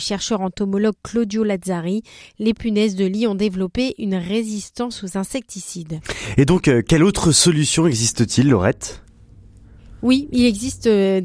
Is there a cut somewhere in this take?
no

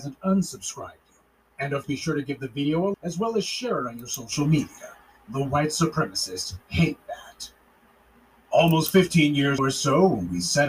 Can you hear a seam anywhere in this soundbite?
yes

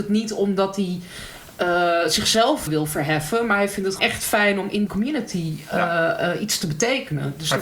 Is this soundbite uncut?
no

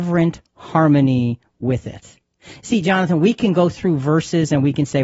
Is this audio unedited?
yes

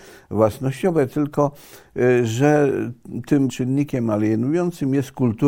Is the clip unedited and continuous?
no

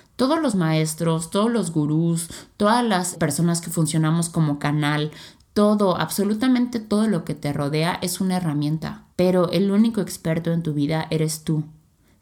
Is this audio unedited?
no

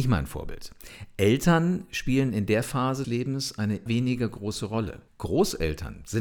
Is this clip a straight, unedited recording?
no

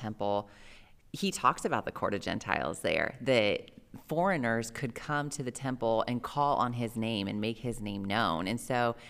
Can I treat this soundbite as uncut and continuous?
yes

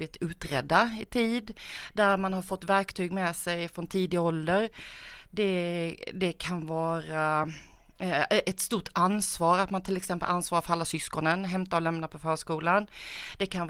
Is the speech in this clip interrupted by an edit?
no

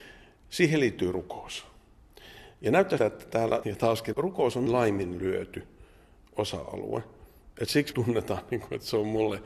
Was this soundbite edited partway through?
yes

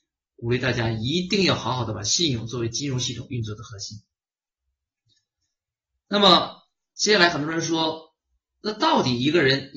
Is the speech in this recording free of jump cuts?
yes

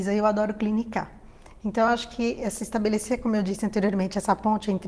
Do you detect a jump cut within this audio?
no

